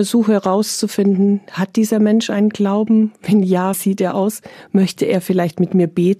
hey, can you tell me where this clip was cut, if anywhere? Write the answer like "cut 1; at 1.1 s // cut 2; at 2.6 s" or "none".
cut 1; at 3.7 s